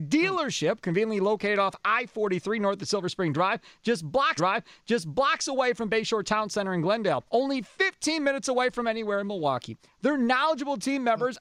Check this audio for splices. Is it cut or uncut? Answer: cut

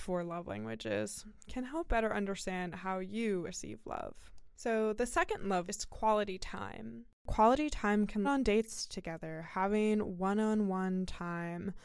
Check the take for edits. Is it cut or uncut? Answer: cut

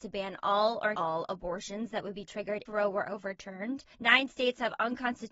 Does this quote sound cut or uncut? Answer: cut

